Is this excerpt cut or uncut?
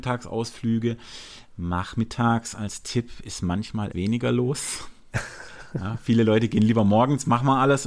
cut